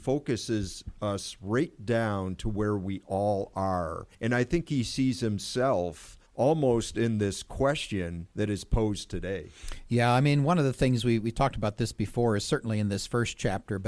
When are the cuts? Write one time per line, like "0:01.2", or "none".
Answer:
0:04.1
0:06.3
0:08.3

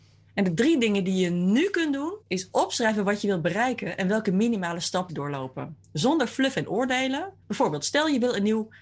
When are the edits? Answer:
0:02.2
0:05.1
0:07.4

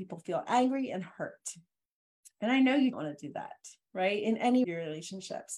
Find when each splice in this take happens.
0:02.9
0:04.6

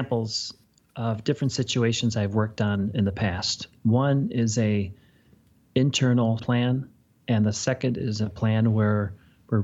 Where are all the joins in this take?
0:06.4

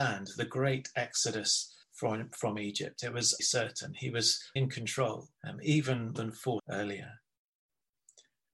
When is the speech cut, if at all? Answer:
0:01.8
0:03.4
0:04.6
0:05.4
0:06.1
0:06.6

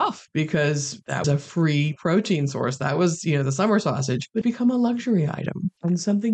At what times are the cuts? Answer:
0:01.2
0:04.4

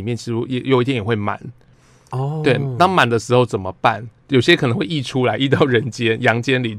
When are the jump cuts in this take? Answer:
0:04.2

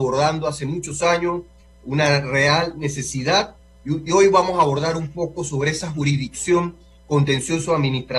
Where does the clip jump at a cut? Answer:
none

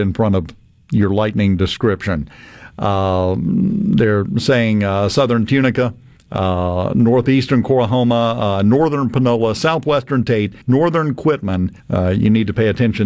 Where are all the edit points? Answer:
0:06.2
0:10.6
0:11.8

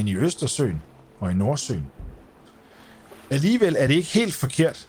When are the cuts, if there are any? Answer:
none

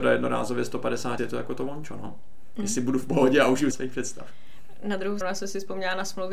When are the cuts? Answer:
0:01.2
0:03.7
0:05.2

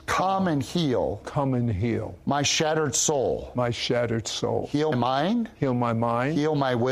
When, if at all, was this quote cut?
0:04.9

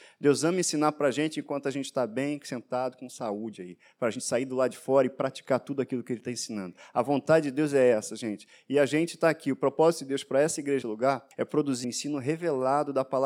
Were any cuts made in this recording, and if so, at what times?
0:10.8
0:11.3
0:11.8

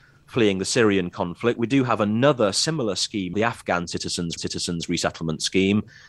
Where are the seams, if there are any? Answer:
0:03.3
0:04.4

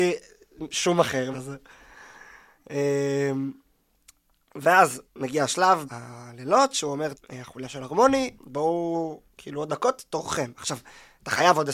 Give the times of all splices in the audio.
0:01.3
0:05.1
0:05.8
0:07.1
0:08.4
0:09.7

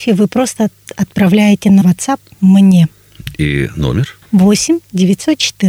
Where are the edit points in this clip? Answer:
0:01.8

